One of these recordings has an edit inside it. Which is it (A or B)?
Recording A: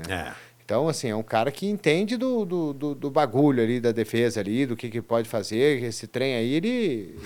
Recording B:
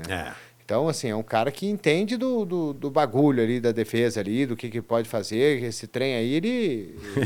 B